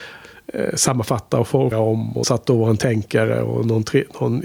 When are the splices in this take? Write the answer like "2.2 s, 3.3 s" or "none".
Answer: 1.7 s, 2.2 s